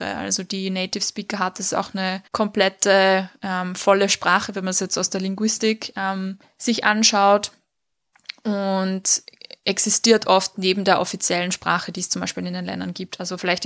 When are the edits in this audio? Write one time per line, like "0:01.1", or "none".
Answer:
0:02.3
0:06.4